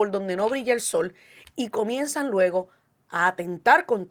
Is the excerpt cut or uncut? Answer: uncut